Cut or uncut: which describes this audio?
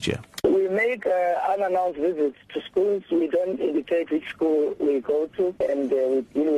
uncut